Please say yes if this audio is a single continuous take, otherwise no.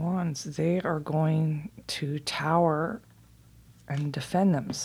yes